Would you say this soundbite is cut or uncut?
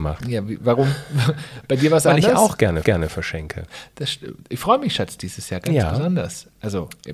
cut